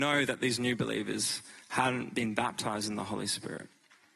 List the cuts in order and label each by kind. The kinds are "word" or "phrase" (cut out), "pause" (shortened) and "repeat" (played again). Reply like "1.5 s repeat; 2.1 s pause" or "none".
none